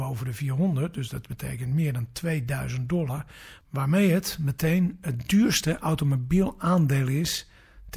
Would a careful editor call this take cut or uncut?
uncut